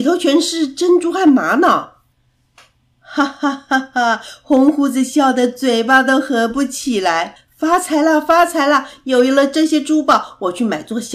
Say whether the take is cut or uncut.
cut